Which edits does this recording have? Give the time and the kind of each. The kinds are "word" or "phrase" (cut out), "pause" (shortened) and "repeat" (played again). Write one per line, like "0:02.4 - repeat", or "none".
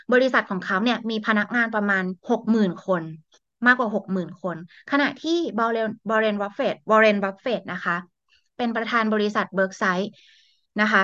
0:02.2 - pause